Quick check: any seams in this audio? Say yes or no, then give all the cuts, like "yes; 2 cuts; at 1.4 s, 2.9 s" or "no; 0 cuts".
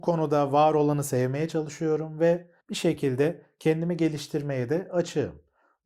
yes; 1 cut; at 2.6 s